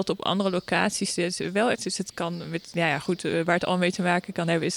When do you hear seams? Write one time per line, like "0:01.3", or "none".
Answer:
0:01.7